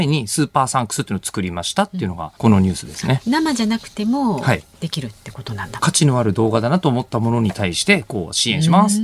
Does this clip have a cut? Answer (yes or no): yes